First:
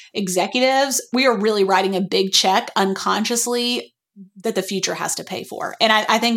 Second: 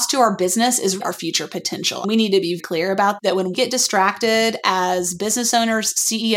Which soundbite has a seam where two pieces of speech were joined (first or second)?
second